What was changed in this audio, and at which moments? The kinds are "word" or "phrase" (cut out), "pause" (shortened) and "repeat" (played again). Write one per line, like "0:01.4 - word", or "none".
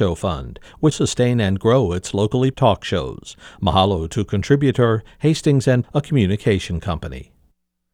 0:00.9 - phrase
0:02.5 - word
0:05.8 - word